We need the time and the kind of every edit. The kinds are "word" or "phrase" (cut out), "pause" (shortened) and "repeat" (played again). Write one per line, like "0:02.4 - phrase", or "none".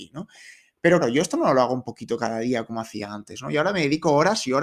0:01.0 - word